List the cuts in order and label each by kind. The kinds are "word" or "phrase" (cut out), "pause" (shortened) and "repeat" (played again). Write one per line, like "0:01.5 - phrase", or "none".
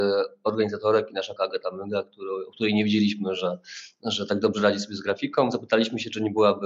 0:01.4 - word